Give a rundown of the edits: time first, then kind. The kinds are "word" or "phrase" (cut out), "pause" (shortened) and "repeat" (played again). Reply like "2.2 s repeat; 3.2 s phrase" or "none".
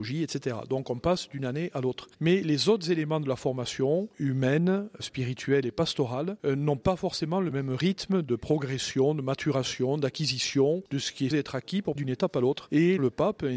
11.3 s word; 12.0 s word